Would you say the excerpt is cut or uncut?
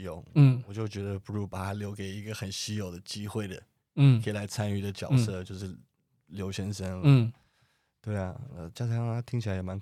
uncut